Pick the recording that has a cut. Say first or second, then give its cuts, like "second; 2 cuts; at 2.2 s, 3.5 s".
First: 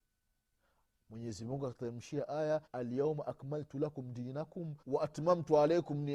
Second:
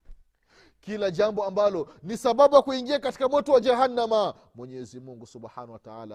first; 2 cuts; at 2.6 s, 4.8 s